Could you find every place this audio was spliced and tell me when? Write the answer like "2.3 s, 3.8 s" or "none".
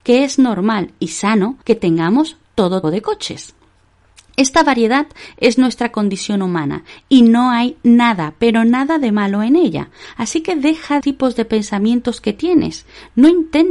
1.6 s, 2.8 s, 11.0 s